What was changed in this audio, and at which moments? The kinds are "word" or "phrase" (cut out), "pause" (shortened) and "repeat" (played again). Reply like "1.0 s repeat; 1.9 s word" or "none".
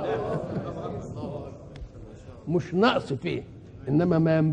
none